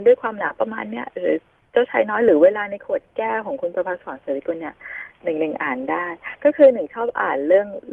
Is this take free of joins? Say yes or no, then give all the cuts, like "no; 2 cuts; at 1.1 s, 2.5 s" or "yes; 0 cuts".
yes; 0 cuts